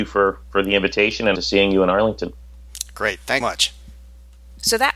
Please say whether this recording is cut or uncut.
cut